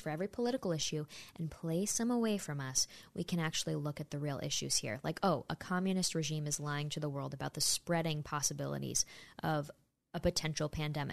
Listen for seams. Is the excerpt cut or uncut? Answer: uncut